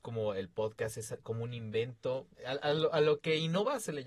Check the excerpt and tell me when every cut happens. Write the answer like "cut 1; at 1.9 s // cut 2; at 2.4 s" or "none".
cut 1; at 2.3 s